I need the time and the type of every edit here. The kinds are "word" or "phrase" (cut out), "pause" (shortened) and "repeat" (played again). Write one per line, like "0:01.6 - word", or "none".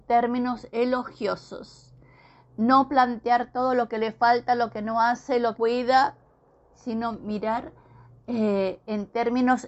0:05.5 - phrase